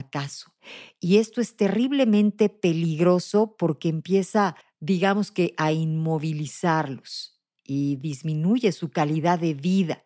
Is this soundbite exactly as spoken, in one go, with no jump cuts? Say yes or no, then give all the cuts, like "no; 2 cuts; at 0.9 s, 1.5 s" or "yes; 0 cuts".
no; 1 cut; at 4.6 s